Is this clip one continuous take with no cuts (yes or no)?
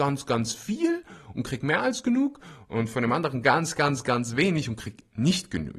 yes